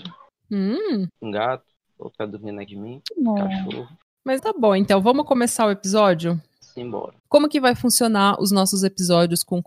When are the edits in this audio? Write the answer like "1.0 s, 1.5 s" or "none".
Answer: 2.1 s, 2.7 s, 4.4 s, 7.2 s